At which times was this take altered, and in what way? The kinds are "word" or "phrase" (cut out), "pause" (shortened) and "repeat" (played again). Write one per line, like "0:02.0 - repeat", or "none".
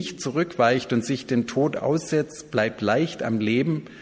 none